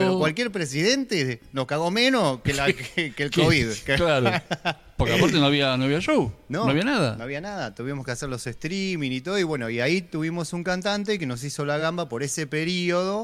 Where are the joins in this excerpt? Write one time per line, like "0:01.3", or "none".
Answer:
none